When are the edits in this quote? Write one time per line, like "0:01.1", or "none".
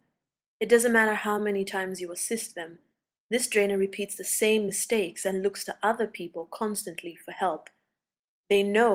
none